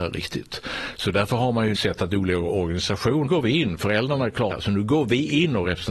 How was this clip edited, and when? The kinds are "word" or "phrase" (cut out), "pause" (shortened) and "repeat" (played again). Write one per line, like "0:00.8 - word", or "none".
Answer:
0:01.7 - word
0:03.3 - phrase
0:04.5 - phrase

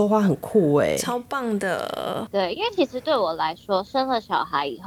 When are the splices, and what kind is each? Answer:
0:02.3 - word

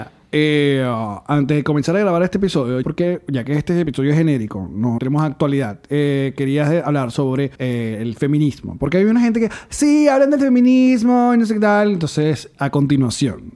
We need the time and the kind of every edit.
0:02.8 - phrase
0:05.0 - word
0:07.5 - pause

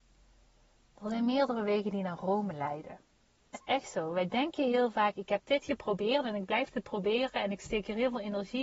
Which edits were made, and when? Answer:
0:03.5 - word

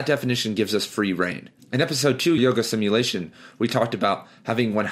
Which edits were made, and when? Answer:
0:01.6 - pause
0:02.4 - word

